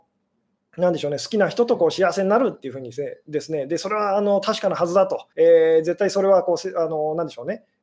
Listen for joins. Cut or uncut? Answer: cut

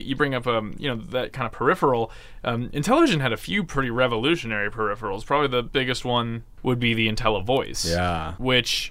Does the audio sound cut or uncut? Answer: cut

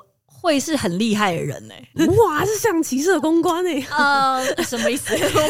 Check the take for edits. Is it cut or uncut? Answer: cut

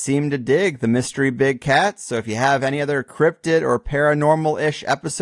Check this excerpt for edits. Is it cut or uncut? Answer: uncut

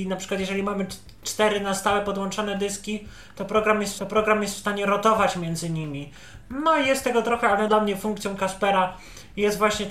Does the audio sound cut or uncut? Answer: cut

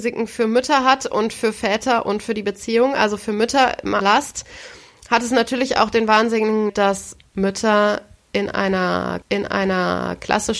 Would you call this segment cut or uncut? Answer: cut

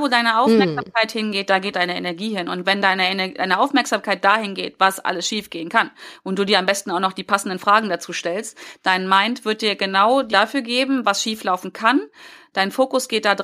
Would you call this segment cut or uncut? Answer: cut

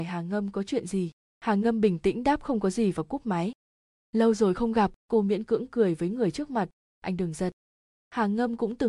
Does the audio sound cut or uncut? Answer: cut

